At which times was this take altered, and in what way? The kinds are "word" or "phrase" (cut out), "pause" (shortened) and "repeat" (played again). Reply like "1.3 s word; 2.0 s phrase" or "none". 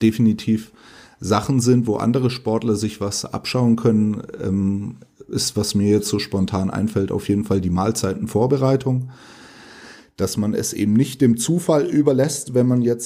none